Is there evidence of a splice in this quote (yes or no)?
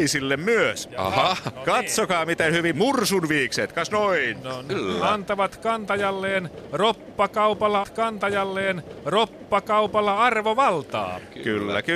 yes